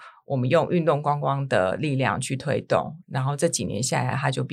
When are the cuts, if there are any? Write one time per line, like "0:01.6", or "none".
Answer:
0:03.0